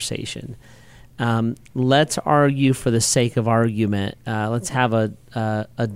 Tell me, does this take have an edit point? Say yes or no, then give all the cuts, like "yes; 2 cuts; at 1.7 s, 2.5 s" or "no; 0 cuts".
no; 0 cuts